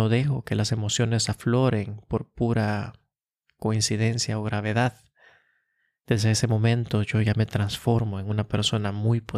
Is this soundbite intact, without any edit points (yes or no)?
yes